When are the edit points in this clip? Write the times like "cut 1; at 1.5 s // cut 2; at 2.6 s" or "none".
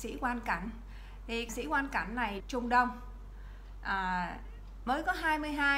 cut 1; at 1.5 s // cut 2; at 2.4 s